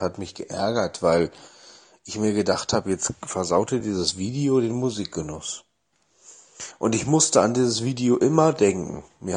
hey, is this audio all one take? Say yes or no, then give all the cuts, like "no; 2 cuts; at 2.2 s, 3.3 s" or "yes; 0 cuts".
yes; 0 cuts